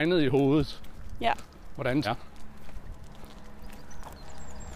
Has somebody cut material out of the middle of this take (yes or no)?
yes